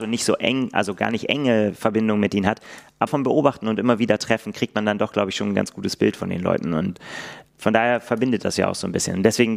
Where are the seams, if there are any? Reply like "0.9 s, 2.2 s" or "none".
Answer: 3.1 s, 7.5 s